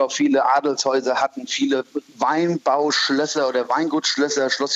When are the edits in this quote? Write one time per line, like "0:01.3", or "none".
none